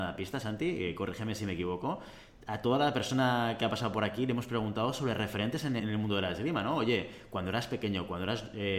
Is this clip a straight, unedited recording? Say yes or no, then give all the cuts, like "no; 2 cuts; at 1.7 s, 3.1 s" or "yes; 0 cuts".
no; 1 cut; at 5.8 s